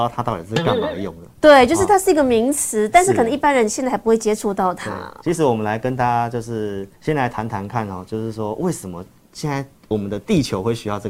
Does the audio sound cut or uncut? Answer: cut